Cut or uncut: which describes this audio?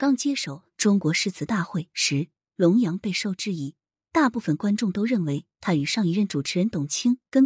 uncut